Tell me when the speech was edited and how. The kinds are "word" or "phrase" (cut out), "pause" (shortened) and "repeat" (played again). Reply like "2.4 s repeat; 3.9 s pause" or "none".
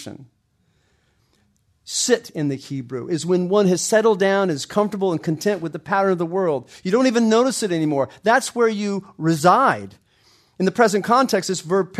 none